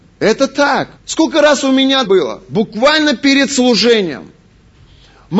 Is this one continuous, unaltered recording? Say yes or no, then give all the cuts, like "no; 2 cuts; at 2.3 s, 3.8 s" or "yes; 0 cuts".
no; 2 cuts; at 1.0 s, 2.1 s